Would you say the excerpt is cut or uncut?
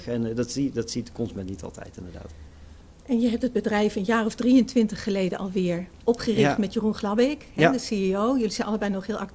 uncut